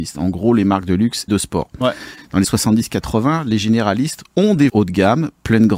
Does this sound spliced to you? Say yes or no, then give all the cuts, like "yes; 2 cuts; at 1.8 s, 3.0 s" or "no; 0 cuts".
yes; 4 cuts; at 1.3 s, 2.4 s, 4.3 s, 4.7 s